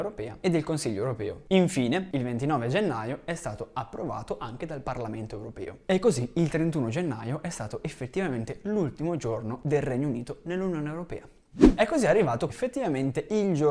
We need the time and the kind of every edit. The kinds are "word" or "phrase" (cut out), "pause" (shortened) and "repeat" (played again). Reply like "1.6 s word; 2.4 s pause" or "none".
12.5 s word